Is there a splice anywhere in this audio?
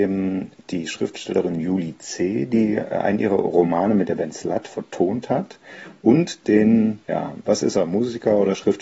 yes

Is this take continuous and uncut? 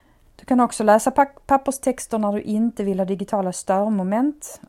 yes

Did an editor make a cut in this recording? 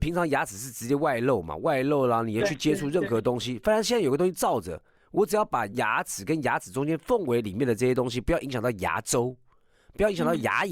no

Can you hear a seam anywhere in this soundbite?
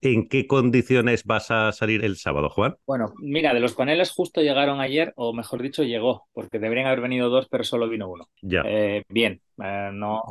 yes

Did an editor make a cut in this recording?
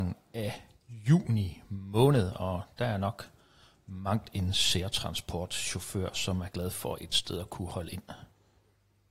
no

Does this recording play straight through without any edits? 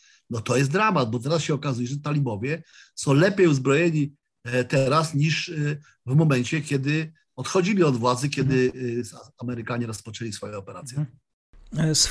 yes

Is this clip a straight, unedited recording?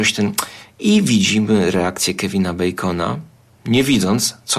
yes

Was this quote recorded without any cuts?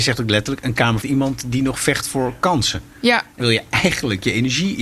no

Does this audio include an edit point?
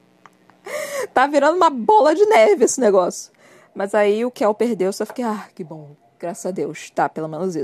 no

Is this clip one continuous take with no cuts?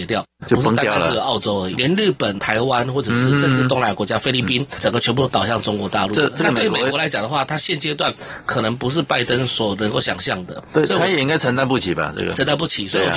no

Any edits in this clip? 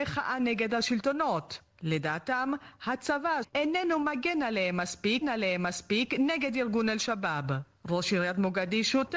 yes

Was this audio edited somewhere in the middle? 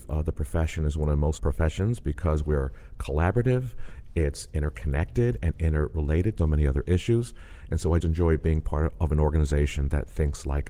yes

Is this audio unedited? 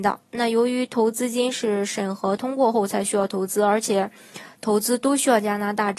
yes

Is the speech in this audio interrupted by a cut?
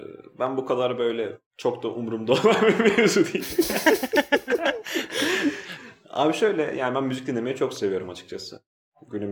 yes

